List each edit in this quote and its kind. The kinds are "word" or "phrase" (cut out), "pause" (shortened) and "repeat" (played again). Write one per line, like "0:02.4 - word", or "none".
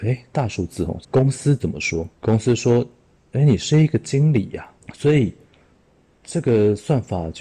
0:01.0 - phrase
0:02.1 - pause
0:04.8 - pause